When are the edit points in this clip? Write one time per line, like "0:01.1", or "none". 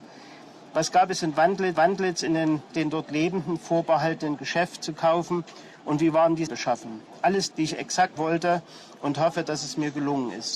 0:01.7
0:02.7
0:04.8
0:06.5
0:07.5
0:08.2